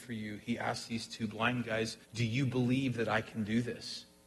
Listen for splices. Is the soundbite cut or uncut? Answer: cut